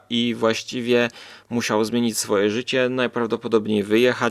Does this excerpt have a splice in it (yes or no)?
no